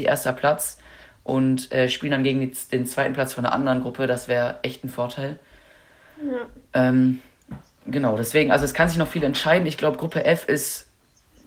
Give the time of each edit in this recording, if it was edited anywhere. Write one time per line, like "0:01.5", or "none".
none